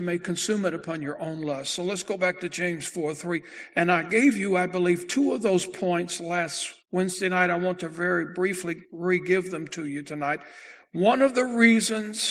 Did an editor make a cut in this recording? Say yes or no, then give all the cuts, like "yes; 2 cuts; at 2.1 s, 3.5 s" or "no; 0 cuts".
yes; 2 cuts; at 6.8 s, 8.8 s